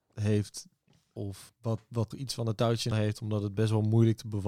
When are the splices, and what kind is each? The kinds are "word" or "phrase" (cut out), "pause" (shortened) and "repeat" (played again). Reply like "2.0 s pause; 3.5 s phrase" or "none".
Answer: 1.2 s word; 1.5 s word; 2.1 s word; 2.9 s word